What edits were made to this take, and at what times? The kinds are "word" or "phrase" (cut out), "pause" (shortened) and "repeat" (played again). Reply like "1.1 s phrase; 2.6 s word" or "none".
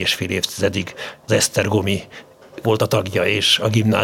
1.3 s word; 2.6 s word